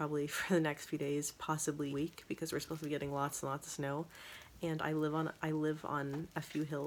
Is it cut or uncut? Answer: cut